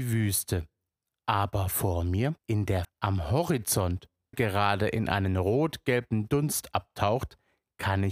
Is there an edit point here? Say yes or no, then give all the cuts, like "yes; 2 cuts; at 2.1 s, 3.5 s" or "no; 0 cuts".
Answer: yes; 3 cuts; at 2.4 s, 2.8 s, 4.3 s